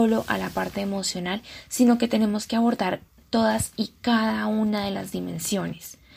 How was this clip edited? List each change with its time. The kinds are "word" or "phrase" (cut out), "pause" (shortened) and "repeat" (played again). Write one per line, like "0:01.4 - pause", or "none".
none